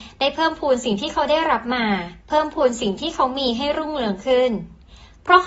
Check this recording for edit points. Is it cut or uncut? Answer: cut